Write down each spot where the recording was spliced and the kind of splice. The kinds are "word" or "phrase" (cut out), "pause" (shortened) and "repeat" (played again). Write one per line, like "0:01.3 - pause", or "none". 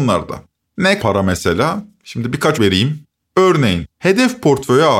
0:01.0 - word
0:02.6 - word
0:03.9 - pause